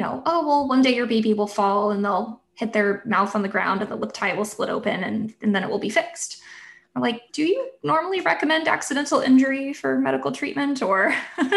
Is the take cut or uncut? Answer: cut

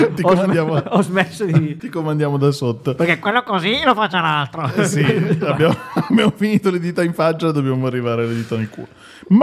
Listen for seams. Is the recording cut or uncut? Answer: uncut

